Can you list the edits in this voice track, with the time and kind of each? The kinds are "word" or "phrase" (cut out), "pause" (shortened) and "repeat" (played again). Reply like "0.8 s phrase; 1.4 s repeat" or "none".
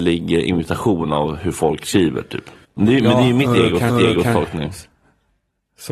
2.6 s pause; 3.9 s repeat